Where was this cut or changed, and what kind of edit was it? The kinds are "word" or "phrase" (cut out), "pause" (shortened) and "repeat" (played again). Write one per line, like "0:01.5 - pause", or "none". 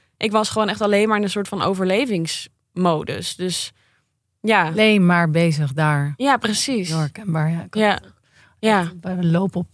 none